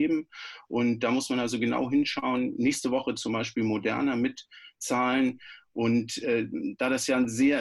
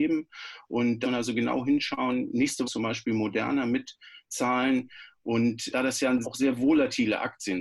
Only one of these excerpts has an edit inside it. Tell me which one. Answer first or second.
second